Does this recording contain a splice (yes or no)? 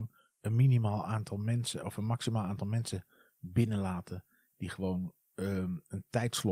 no